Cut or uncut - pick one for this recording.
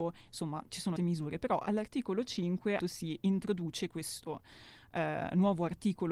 cut